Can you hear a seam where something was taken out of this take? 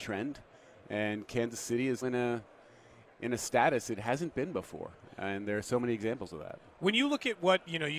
yes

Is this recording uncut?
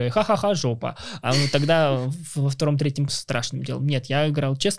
no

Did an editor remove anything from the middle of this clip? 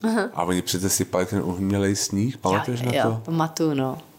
no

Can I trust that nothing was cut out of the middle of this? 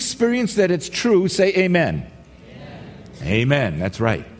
yes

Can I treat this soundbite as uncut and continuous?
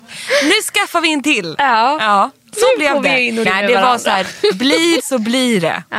no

